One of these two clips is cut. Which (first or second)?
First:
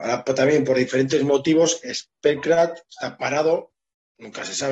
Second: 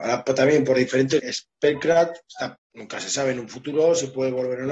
second